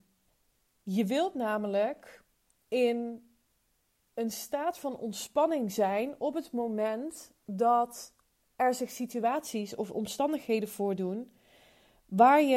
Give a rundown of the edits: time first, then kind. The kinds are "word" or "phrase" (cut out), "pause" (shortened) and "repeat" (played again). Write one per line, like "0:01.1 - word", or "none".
none